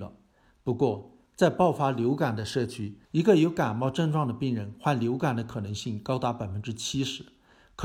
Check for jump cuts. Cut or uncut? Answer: cut